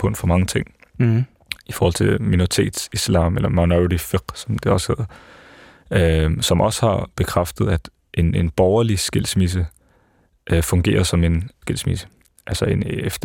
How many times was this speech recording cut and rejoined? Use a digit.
1